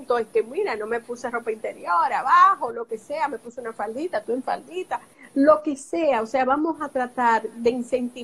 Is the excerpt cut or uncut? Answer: uncut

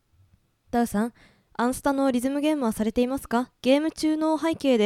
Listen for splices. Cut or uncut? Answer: cut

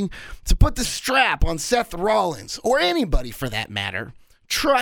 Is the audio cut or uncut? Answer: uncut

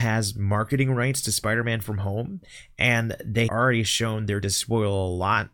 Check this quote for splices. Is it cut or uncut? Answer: cut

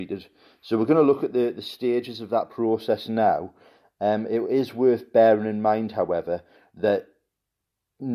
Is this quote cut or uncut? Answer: uncut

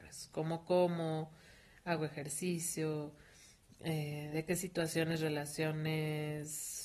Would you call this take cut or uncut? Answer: uncut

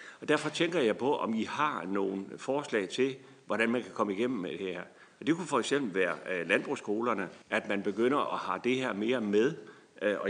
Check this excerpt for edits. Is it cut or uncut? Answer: cut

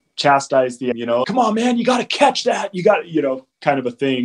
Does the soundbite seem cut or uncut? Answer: cut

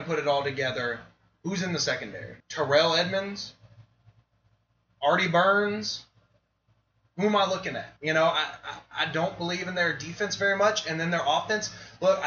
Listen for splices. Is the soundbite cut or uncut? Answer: cut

